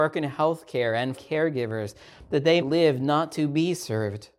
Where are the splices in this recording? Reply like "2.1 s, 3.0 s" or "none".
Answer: 1.2 s, 2.6 s